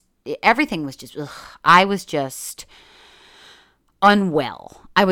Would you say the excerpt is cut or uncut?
uncut